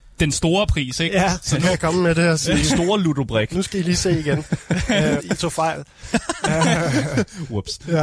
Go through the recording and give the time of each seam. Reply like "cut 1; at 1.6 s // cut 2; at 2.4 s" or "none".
cut 1; at 5.2 s